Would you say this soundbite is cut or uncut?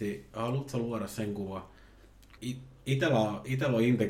cut